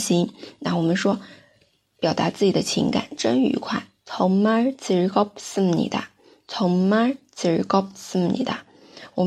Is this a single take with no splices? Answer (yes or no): yes